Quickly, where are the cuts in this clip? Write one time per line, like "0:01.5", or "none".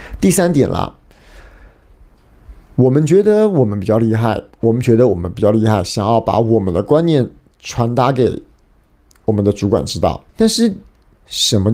0:04.5
0:10.3